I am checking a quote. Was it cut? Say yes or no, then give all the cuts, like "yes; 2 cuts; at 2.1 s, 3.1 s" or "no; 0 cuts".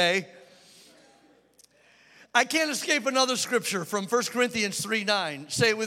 no; 0 cuts